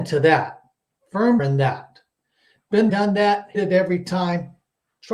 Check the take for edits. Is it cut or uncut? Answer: cut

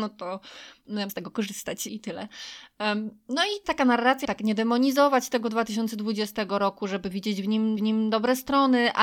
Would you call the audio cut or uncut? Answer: cut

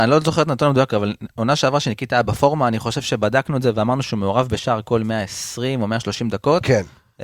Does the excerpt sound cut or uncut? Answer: uncut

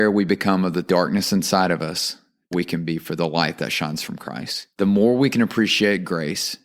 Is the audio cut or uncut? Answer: cut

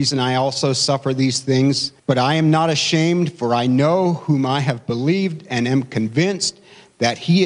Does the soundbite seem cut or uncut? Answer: cut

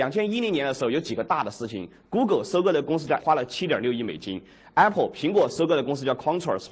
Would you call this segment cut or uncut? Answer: cut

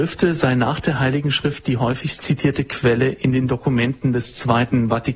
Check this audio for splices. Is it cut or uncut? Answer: uncut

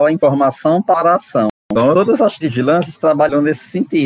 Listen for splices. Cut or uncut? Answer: cut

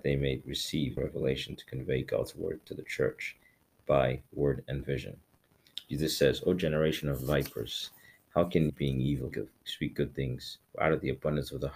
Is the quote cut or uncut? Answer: cut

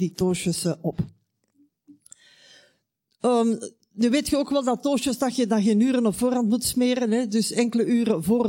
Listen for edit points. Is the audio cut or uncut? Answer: uncut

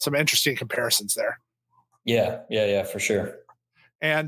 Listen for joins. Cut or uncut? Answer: uncut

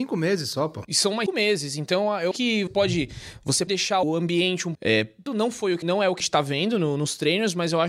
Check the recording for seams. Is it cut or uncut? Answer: cut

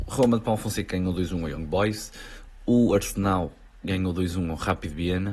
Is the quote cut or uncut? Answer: uncut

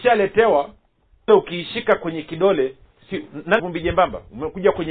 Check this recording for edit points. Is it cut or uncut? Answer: cut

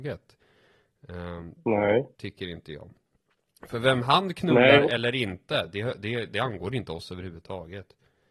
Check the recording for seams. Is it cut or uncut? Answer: uncut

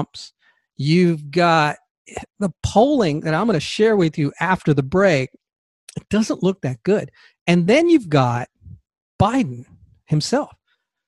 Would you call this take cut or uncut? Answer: uncut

